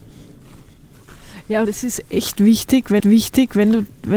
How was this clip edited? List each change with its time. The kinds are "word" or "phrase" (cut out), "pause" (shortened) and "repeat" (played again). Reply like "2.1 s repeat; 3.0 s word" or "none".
1.6 s word; 3.0 s repeat